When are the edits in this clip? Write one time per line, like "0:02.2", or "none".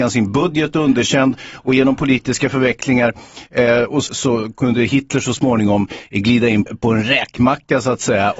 0:04.1
0:06.7